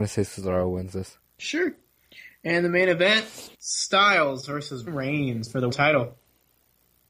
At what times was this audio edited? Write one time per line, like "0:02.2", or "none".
0:01.2
0:03.5
0:04.9
0:05.7